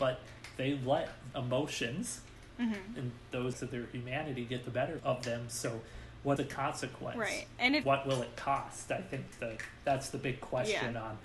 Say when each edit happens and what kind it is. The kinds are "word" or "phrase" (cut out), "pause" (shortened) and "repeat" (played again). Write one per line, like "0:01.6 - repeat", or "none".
0:01.3 - word
0:03.5 - word
0:05.0 - word
0:06.4 - word
0:07.8 - word
0:09.3 - word